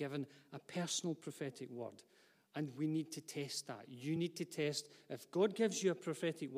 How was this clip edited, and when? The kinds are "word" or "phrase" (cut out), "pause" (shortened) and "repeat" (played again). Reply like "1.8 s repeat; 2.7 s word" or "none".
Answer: none